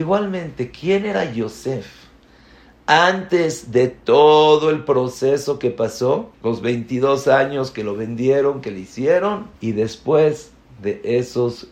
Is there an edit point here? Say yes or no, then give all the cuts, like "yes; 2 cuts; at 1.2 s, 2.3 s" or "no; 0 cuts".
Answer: yes; 2 cuts; at 6.3 s, 9.5 s